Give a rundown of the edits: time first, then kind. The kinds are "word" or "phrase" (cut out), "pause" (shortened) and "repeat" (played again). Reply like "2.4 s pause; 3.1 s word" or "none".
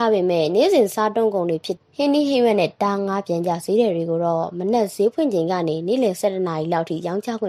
1.9 s pause